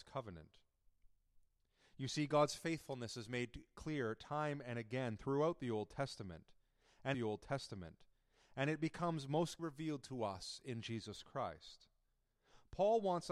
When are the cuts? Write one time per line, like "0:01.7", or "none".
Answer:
0:07.1
0:09.6